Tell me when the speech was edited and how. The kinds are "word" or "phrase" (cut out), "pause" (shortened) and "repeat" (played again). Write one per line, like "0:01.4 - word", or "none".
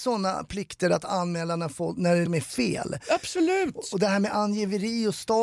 0:02.3 - word